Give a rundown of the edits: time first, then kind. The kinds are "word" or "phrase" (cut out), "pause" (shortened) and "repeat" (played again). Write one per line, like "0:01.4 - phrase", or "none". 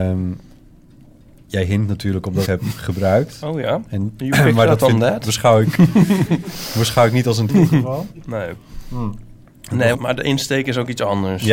0:02.4 - phrase
0:07.5 - word
0:09.4 - pause
0:09.9 - word